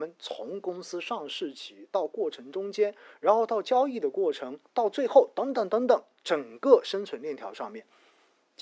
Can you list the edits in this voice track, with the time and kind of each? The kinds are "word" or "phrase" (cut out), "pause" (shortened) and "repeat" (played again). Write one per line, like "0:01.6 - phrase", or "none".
0:06.1 - pause